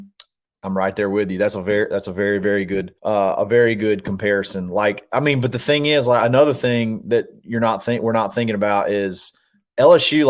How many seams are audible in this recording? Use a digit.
1